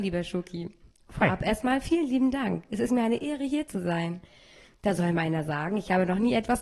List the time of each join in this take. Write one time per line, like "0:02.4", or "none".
none